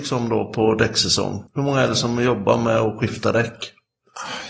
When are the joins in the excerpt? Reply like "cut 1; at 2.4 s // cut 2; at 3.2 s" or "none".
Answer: cut 1; at 1.5 s